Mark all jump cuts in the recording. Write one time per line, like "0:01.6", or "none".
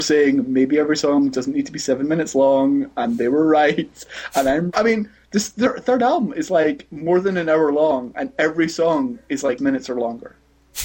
0:04.7
0:09.6